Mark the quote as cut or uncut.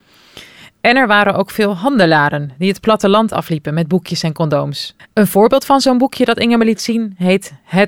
cut